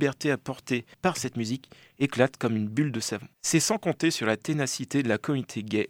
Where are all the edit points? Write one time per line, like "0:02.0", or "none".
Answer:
0:00.9
0:03.3